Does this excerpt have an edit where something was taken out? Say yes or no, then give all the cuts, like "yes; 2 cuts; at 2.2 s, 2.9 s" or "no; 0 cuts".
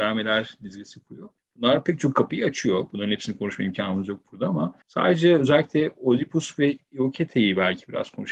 yes; 2 cuts; at 1.4 s, 4.8 s